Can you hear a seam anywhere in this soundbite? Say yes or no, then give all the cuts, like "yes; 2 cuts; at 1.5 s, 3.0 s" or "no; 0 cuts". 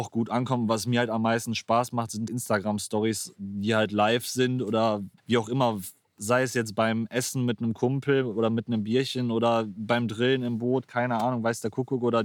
yes; 2 cuts; at 2.3 s, 5.2 s